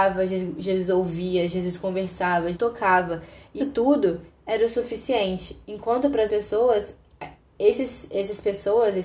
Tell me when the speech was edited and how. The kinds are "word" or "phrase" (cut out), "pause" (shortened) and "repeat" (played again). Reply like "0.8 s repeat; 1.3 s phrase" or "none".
2.5 s word; 3.6 s word; 6.3 s word; 7.4 s pause